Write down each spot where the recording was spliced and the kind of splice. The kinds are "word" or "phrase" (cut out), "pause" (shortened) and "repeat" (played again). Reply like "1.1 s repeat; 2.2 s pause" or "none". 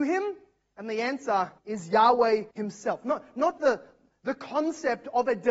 1.6 s pause; 2.5 s pause; 3.6 s word